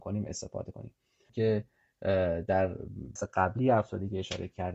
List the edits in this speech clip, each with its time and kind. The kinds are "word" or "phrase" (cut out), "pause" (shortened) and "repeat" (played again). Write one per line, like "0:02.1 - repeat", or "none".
0:01.3 - word
0:03.2 - word